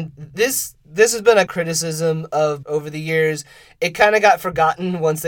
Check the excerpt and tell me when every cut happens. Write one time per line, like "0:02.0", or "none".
0:01.5
0:02.6